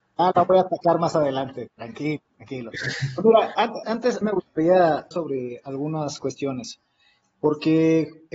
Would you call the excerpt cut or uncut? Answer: cut